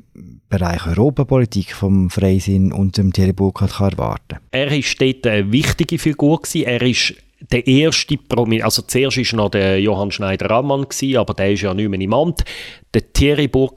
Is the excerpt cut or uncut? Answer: cut